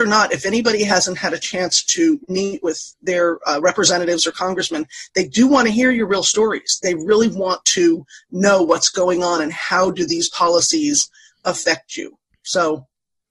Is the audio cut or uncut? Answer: uncut